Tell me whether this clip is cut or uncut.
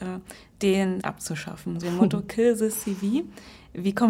cut